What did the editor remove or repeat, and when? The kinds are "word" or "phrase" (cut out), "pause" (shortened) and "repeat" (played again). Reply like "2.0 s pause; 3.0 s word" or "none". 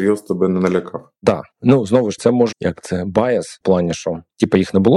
1.5 s pause; 2.2 s word; 2.5 s word; 3.6 s word